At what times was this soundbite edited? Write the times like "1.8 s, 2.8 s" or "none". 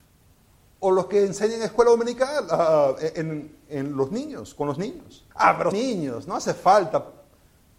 5.3 s, 5.7 s